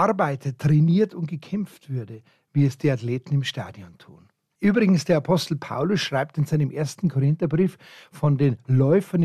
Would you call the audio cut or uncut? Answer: uncut